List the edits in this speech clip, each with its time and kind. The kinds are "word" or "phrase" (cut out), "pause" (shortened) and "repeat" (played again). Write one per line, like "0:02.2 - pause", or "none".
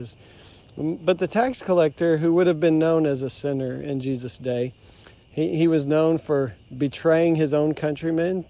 none